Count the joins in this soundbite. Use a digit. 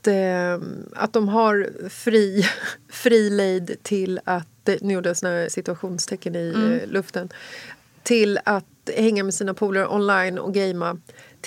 1